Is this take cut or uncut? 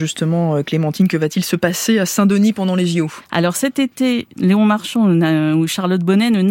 cut